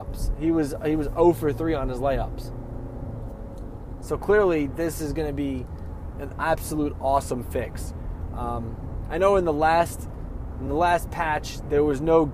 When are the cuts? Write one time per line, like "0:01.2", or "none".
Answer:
none